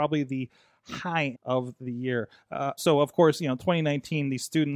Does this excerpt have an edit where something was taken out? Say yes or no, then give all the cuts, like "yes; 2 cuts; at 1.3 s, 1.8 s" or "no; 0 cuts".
yes; 2 cuts; at 1.3 s, 2.8 s